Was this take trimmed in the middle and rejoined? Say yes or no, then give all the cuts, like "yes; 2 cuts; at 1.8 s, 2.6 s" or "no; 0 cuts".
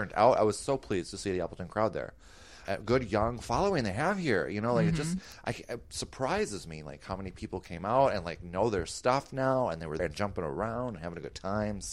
yes; 1 cut; at 10.0 s